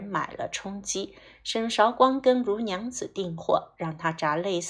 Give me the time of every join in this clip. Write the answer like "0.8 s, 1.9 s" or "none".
none